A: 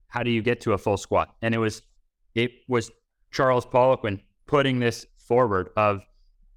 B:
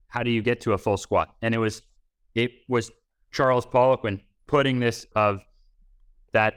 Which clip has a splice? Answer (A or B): B